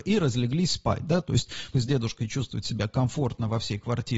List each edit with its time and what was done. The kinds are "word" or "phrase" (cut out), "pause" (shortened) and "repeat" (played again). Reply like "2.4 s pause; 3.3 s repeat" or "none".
1.7 s word